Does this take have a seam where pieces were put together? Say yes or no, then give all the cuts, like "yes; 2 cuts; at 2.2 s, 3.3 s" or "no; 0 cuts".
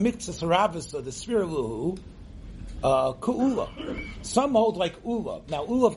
no; 0 cuts